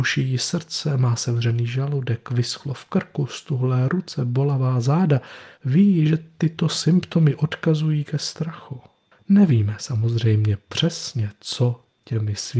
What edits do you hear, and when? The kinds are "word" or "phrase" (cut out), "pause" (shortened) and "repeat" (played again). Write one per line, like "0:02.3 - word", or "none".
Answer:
0:05.5 - pause
0:09.0 - pause